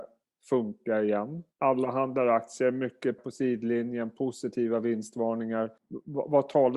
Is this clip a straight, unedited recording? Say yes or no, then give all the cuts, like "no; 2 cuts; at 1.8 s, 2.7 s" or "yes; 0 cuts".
no; 3 cuts; at 1.5 s, 3.2 s, 5.8 s